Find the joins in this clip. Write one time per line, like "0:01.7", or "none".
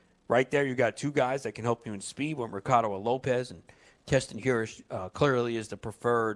none

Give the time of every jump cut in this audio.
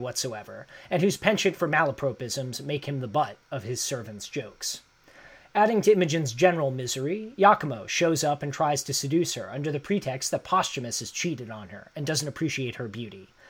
none

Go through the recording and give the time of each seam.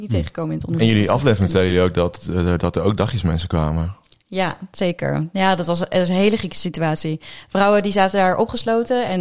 none

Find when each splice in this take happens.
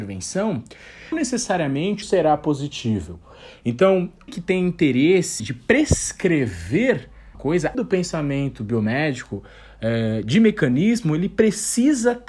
0:01.1
0:02.0
0:04.3
0:05.4
0:07.3
0:07.7

